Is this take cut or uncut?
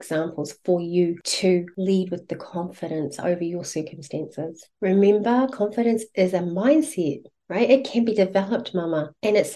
uncut